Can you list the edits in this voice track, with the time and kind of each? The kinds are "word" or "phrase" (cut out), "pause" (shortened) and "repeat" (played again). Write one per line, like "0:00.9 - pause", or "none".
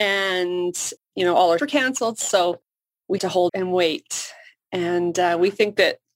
0:01.0 - word
0:01.6 - word
0:03.2 - word
0:03.5 - word